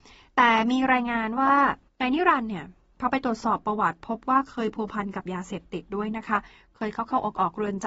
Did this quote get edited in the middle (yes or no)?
yes